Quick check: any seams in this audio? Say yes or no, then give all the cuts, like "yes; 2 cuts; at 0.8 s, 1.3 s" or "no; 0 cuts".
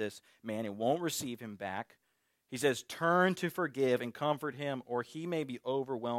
no; 0 cuts